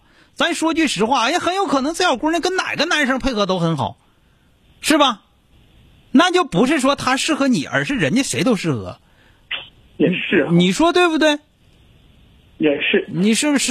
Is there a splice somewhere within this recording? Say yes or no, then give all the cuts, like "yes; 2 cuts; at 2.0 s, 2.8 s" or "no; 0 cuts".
no; 0 cuts